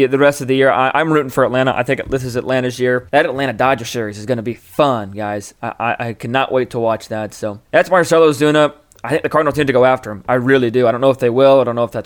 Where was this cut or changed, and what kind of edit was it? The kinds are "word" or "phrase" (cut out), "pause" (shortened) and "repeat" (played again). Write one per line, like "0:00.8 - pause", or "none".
0:03.1 - pause
0:07.7 - pause